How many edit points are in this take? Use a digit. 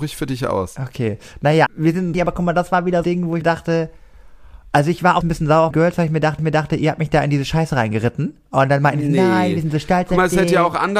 7